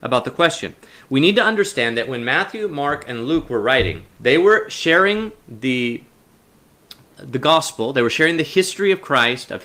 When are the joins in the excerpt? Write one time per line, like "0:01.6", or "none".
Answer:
0:04.1